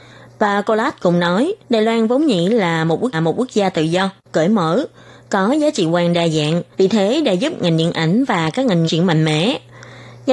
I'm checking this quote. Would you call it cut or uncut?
cut